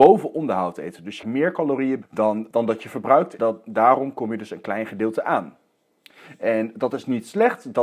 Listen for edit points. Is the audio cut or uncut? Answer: cut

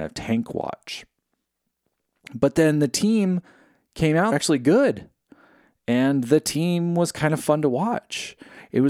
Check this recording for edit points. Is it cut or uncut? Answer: cut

